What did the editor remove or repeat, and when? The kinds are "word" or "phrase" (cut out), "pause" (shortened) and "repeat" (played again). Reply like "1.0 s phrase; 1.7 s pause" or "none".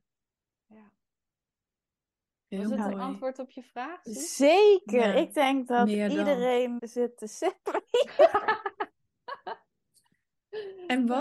6.8 s word